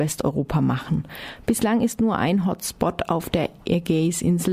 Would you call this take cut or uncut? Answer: uncut